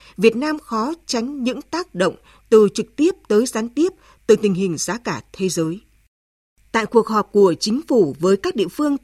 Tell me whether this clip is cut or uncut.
uncut